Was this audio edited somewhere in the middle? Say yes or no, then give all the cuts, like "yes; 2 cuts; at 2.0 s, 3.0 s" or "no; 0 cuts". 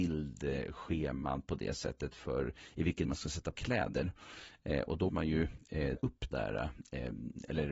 yes; 5 cuts; at 3.0 s, 3.5 s, 5.1 s, 6.0 s, 6.3 s